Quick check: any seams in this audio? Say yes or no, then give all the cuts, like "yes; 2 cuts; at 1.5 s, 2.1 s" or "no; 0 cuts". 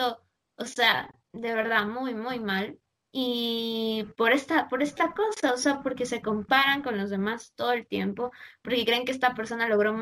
no; 0 cuts